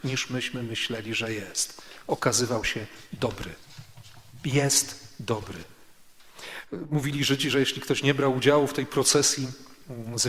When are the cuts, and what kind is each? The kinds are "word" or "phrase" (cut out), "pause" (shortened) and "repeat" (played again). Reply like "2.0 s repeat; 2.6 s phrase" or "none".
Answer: none